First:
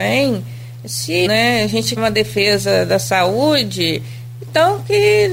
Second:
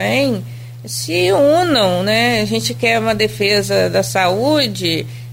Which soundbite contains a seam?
first; 3 cuts; at 1.3 s, 2.0 s, 4.4 s

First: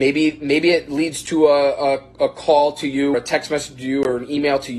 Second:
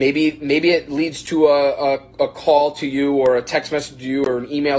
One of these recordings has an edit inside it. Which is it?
first; 1 cut; at 3.1 s

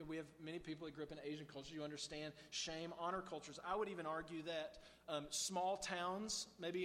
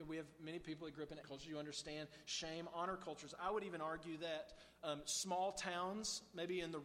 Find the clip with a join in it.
second; 1 cut; at 1.2 s

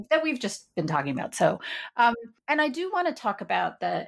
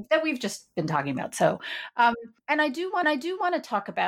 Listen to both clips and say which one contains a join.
second; 1 cut; at 3.0 s

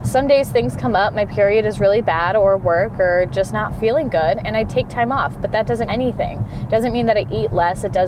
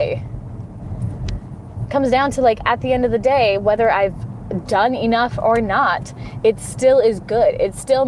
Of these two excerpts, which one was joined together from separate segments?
first; 1 cut; at 5.9 s

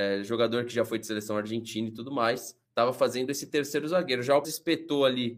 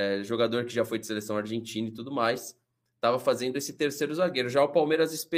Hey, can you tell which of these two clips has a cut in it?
first; 2 cuts; at 2.7 s, 4.4 s

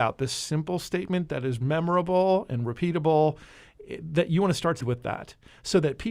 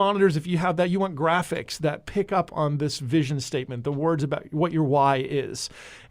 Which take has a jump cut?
first; 1 cut; at 4.8 s

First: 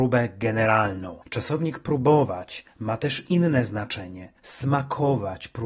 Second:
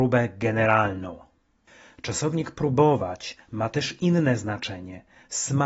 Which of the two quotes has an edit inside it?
first; 2 cuts; at 1.2 s, 4.4 s

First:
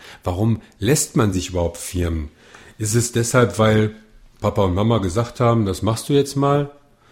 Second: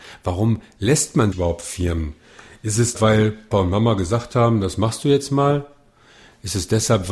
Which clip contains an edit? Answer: second; 3 cuts; at 1.3 s, 2.9 s, 3.5 s

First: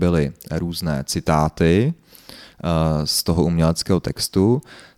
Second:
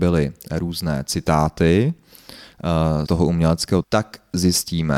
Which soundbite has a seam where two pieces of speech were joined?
second; 2 cuts; at 3.1 s, 3.8 s

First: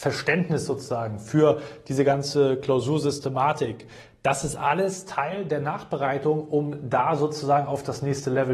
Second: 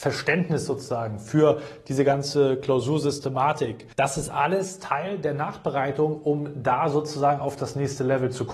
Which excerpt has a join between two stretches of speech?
second; 1 cut; at 3.9 s

